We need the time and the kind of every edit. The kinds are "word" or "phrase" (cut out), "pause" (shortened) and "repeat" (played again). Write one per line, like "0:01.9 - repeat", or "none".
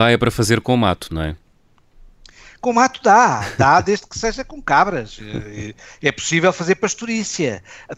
none

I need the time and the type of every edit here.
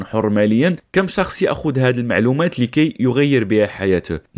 none

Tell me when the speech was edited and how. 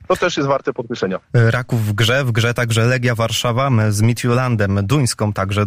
0:01.2 - pause

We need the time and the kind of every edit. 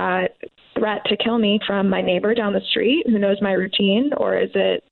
0:01.6 - word

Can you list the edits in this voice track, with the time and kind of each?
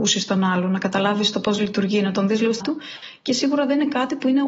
0:02.6 - word

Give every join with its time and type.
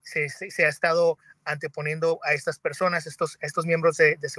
none

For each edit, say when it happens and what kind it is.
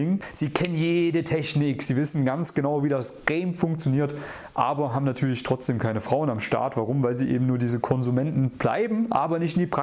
none

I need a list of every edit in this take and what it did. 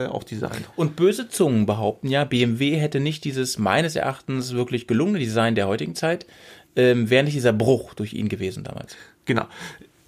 none

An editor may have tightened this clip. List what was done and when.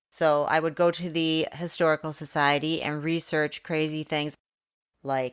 none

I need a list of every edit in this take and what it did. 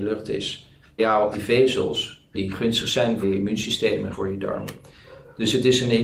0:01.0 - word
0:01.3 - word
0:02.3 - word
0:03.2 - word
0:04.1 - word

